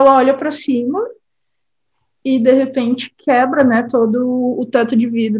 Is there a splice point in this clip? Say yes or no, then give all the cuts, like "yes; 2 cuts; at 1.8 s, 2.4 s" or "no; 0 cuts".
no; 0 cuts